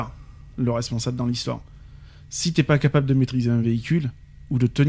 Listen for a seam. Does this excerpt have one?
no; 0 cuts

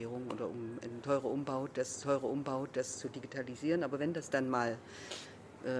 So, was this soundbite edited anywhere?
yes; 1 cut; at 2.0 s

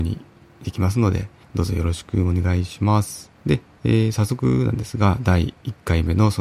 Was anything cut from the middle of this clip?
yes; 2 cuts; at 1.4 s, 3.4 s

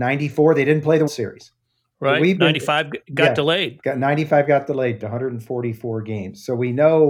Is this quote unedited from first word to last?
no; 2 cuts; at 1.1 s, 5.0 s

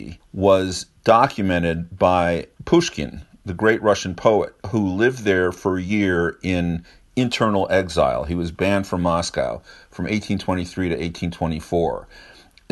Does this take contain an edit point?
no; 0 cuts

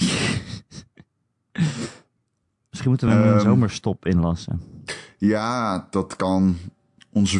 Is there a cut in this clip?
no; 0 cuts

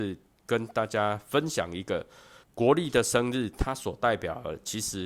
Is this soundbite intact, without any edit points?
no; 1 cut; at 2.4 s

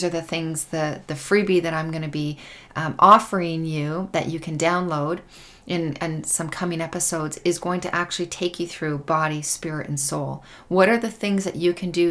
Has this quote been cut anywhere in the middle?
no; 0 cuts

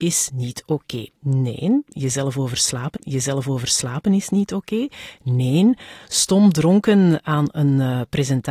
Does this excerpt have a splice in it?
yes; 2 cuts; at 1.2 s, 2.9 s

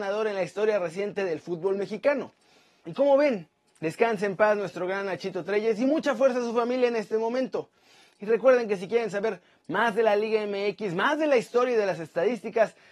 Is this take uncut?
yes; 0 cuts

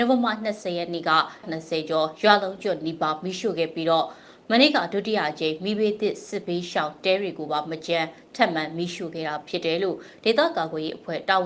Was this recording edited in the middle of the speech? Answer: yes; 1 cut; at 1.4 s

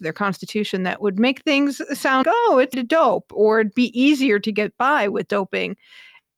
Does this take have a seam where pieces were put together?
yes; 2 cuts; at 2.2 s, 2.7 s

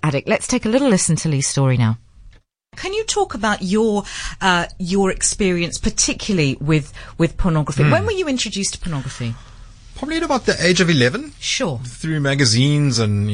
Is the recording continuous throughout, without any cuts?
yes; 0 cuts

